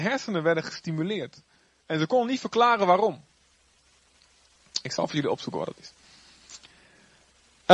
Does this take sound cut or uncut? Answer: uncut